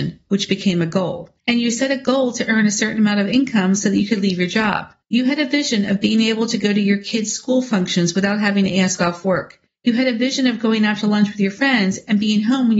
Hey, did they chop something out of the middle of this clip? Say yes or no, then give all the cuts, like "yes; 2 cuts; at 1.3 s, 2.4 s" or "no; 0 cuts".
yes; 3 cuts; at 1.4 s, 5.0 s, 9.7 s